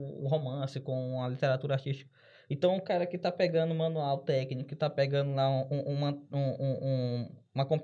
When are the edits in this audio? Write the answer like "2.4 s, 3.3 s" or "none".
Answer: none